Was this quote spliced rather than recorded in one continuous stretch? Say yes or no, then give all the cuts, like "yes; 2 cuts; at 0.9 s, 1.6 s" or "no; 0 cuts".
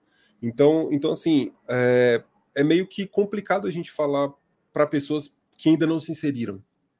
no; 0 cuts